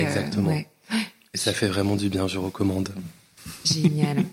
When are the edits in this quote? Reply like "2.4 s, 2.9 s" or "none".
none